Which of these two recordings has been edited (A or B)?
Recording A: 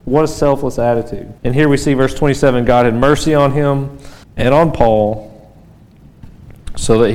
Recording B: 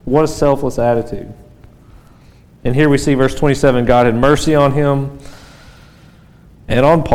A